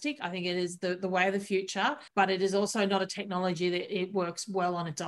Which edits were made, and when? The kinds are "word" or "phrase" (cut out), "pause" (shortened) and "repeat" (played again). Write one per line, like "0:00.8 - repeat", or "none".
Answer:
0:02.1 - pause